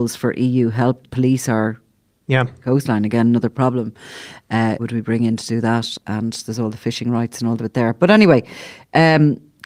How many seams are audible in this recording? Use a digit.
4